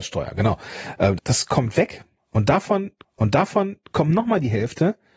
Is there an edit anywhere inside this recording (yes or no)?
yes